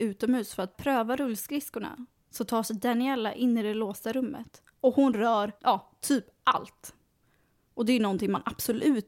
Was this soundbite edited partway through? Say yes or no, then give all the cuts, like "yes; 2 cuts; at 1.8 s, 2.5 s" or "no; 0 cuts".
yes; 2 cuts; at 4.7 s, 5.6 s